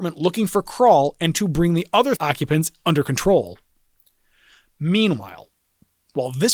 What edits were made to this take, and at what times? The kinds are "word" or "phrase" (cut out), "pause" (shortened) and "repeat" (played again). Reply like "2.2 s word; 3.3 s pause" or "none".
1.3 s word; 2.2 s word